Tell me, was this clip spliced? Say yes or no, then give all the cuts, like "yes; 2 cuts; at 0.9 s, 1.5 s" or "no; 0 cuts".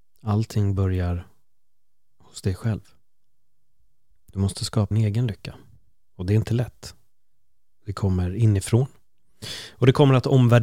yes; 1 cut; at 4.9 s